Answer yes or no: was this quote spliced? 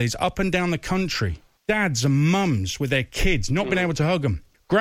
no